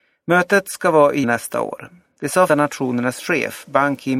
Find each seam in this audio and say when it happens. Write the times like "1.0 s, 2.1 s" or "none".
1.2 s, 2.5 s